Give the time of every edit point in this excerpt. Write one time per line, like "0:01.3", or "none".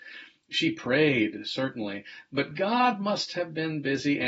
none